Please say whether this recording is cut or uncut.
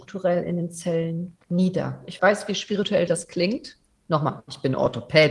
cut